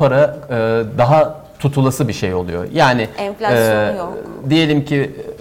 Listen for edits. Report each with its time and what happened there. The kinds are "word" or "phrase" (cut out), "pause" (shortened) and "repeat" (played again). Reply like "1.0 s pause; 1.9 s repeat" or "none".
none